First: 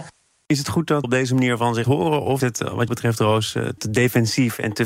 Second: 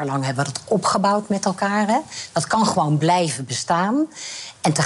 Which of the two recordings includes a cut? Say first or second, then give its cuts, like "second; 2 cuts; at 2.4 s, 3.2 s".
first; 5 cuts; at 1.0 s, 1.8 s, 2.4 s, 2.9 s, 3.8 s